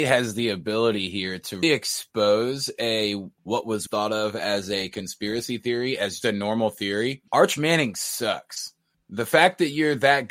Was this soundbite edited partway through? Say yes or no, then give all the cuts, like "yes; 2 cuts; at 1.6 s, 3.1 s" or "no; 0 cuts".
yes; 6 cuts; at 1.6 s, 3.4 s, 3.9 s, 6.2 s, 7.3 s, 8.9 s